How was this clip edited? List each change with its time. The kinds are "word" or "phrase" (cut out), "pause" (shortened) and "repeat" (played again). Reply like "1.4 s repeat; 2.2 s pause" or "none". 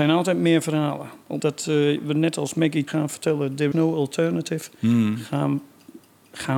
1.4 s word; 2.9 s word; 3.7 s word